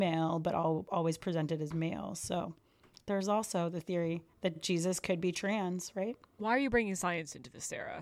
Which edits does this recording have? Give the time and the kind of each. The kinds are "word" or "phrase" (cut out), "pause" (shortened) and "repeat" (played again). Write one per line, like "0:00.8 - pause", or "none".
none